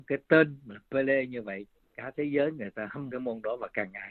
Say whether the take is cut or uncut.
cut